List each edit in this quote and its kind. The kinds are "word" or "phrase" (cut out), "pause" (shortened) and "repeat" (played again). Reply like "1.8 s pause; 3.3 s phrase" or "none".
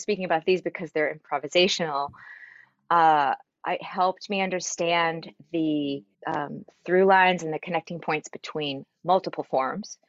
6.1 s pause